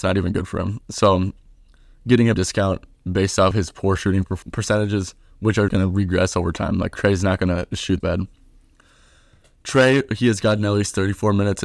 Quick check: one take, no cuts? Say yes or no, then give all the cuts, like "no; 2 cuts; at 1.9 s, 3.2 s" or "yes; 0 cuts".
no; 5 cuts; at 2.3 s, 3.5 s, 4.4 s, 5.7 s, 8.0 s